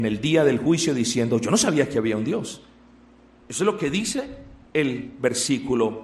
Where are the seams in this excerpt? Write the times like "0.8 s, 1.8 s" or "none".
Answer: none